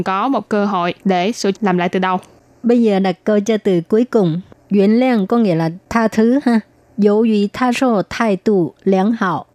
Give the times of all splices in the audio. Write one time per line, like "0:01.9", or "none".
0:01.0
0:01.5
0:07.7